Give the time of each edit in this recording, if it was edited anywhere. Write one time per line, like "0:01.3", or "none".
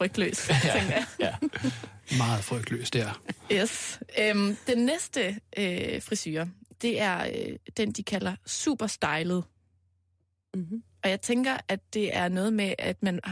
none